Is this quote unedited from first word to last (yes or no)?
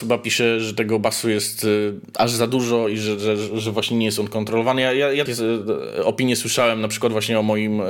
no